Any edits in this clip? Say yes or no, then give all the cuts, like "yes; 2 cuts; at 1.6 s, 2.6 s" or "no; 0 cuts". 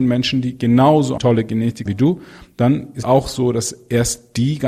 yes; 3 cuts; at 1.2 s, 1.9 s, 3.0 s